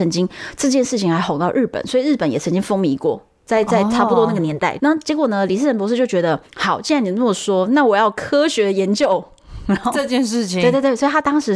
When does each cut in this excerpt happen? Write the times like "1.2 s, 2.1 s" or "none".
4.8 s, 6.5 s